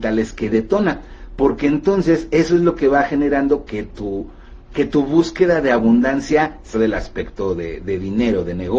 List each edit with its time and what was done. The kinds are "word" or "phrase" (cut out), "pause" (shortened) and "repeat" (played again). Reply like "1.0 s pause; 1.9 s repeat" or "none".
6.7 s phrase